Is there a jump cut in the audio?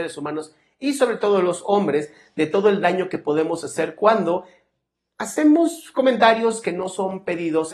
no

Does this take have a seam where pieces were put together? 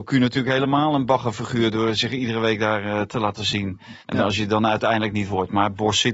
yes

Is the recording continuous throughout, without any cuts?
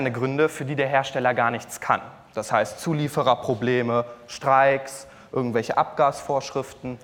yes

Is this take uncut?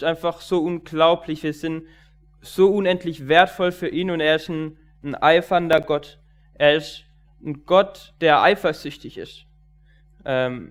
no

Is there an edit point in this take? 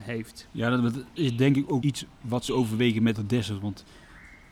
yes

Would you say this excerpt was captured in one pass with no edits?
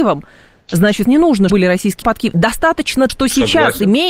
no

